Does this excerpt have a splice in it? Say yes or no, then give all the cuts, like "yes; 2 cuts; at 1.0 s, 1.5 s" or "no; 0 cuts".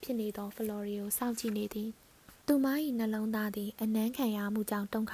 yes; 1 cut; at 2.4 s